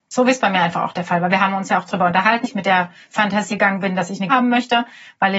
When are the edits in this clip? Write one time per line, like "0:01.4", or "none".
0:01.9
0:02.4
0:03.5
0:04.3

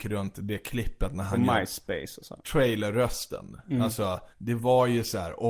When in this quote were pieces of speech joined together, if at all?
0:04.3

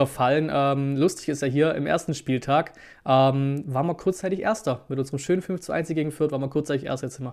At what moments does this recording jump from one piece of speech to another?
none

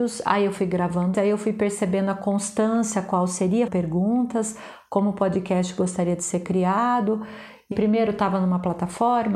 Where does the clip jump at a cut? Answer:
0:01.1
0:03.7
0:07.7

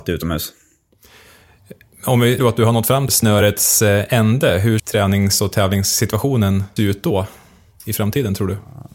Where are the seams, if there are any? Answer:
0:02.4
0:03.1
0:04.8
0:06.8

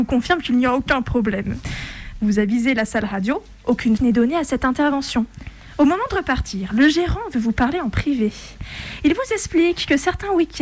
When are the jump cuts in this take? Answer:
0:04.0

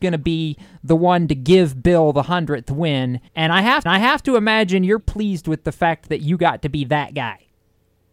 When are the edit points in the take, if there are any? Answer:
0:03.3
0:03.9
0:05.0

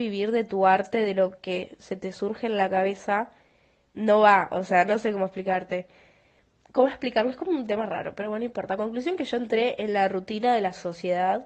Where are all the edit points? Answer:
0:03.8

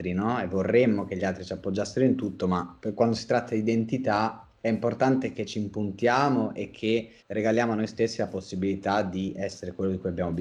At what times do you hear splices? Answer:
0:07.2

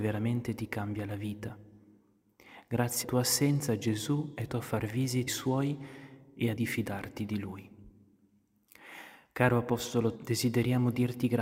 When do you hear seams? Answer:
0:03.0
0:04.5
0:05.3
0:06.6
0:10.1

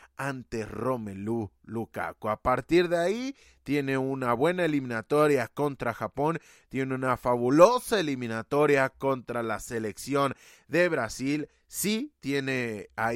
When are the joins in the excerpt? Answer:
none

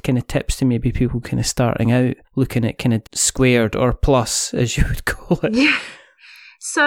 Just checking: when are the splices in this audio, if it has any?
0:02.2
0:03.0

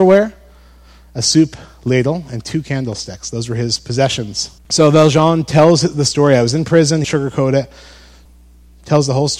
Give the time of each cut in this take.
0:04.6
0:07.0

